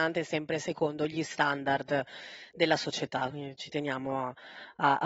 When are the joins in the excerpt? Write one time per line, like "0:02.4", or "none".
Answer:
none